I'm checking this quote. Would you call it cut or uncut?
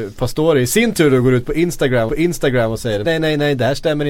cut